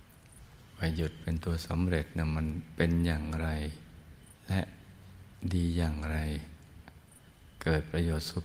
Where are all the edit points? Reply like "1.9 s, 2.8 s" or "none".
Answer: 4.4 s